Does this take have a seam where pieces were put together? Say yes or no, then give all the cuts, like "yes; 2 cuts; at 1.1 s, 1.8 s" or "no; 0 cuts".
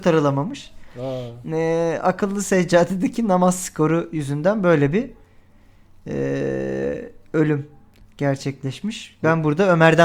no; 0 cuts